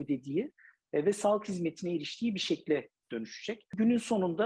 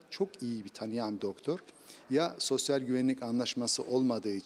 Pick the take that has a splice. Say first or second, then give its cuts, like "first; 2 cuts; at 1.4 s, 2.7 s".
second; 1 cut; at 1.2 s